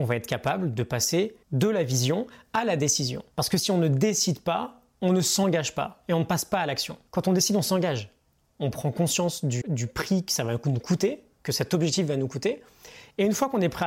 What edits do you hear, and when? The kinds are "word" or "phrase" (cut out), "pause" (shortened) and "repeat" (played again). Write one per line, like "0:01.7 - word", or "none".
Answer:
0:01.4 - pause
0:03.3 - pause
0:07.1 - pause
0:09.6 - word